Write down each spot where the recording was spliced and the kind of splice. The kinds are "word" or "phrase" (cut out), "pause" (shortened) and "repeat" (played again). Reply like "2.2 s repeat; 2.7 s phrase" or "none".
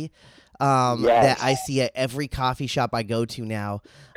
none

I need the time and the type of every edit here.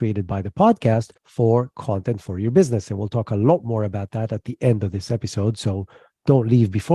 1.2 s pause

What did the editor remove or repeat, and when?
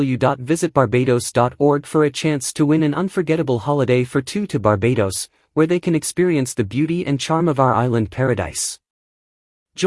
none

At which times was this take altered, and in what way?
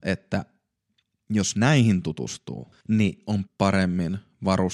2.8 s pause; 3.5 s word

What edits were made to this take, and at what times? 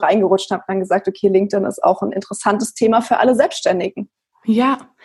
none

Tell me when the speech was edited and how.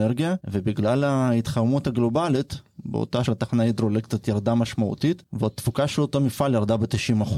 3.3 s phrase

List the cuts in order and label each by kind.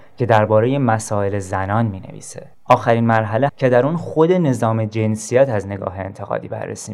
2.5 s pause; 3.5 s phrase

